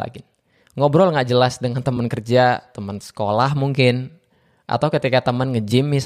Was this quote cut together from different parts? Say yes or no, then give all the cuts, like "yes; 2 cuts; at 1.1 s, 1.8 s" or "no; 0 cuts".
no; 0 cuts